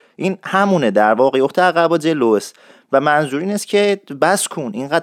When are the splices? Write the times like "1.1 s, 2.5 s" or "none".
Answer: none